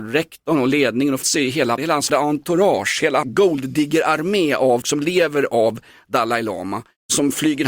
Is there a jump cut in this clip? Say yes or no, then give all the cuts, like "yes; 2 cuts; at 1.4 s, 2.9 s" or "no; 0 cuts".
yes; 5 cuts; at 1.2 s, 1.8 s, 2.1 s, 3.2 s, 4.8 s